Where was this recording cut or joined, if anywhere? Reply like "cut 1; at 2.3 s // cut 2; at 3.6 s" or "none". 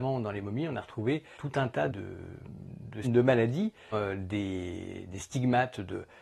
cut 1; at 1.4 s // cut 2; at 1.9 s // cut 3; at 3.0 s // cut 4; at 3.9 s